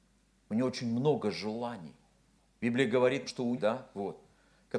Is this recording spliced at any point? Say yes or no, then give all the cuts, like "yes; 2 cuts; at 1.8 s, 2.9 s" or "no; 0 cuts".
yes; 3 cuts; at 2.4 s, 3.3 s, 3.6 s